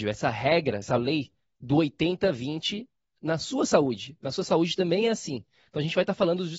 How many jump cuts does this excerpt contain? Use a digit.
0